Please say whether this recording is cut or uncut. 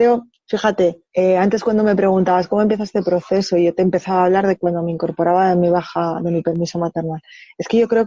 uncut